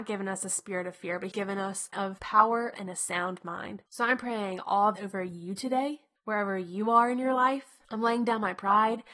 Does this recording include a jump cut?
yes; 7 cuts; at 1.3 s, 1.9 s, 2.7 s, 3.9 s, 5.0 s, 6.2 s, 7.8 s

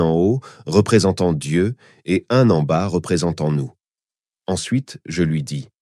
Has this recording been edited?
no; 0 cuts

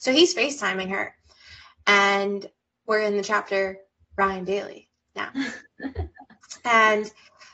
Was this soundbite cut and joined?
no; 0 cuts

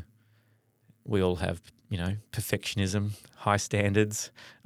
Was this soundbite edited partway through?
no; 0 cuts

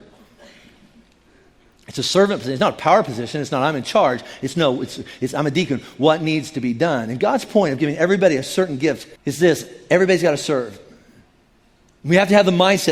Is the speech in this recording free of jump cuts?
no; 1 cut; at 9.2 s

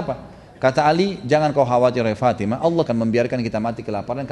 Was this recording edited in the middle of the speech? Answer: yes; 1 cut; at 2.9 s

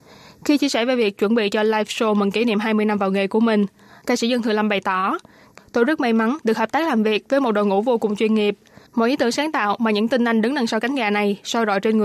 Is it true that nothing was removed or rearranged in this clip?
yes; 0 cuts

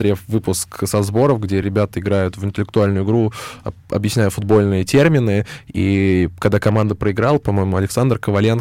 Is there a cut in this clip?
no; 0 cuts

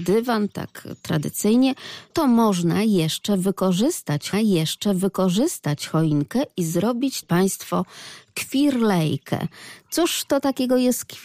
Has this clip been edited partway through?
yes; 3 cuts; at 2.1 s, 4.3 s, 7.2 s

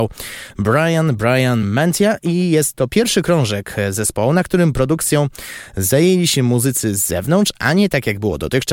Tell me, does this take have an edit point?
no; 0 cuts

